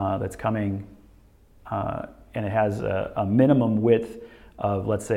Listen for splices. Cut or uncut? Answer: uncut